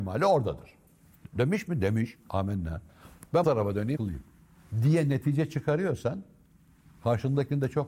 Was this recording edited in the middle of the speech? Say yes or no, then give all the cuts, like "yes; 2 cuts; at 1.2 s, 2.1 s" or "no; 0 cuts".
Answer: yes; 2 cuts; at 3.4 s, 4.0 s